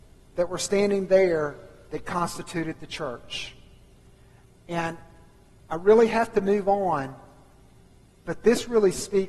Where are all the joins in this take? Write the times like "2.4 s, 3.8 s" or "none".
none

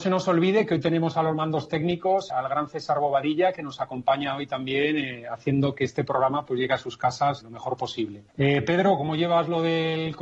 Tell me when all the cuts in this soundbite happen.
2.3 s, 7.4 s, 8.3 s

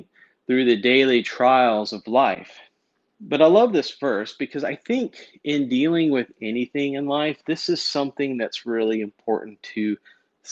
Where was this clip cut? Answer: 2.9 s

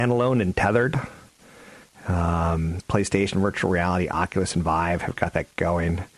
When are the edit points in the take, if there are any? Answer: none

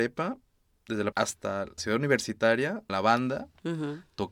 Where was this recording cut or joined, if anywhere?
1.1 s, 1.8 s, 2.9 s

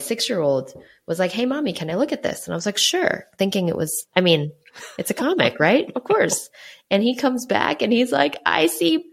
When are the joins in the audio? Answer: none

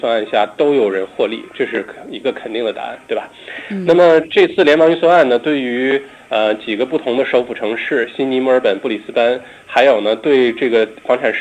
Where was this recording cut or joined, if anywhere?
none

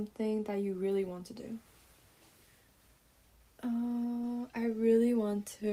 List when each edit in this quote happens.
none

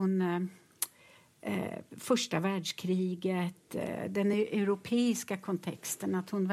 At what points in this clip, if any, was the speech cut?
none

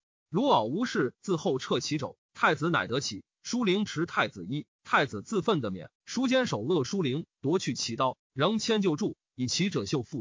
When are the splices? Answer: 6.0 s

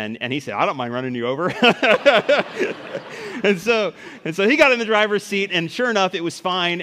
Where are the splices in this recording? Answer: 5.5 s

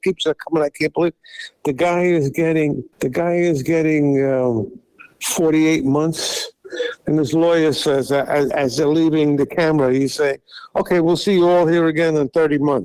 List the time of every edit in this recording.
2.9 s, 5.1 s, 8.5 s

